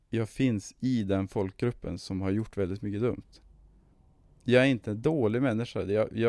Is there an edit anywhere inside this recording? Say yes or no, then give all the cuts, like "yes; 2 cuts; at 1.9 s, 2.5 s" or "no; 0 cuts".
no; 0 cuts